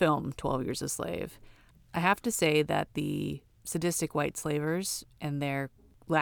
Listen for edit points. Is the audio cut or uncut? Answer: uncut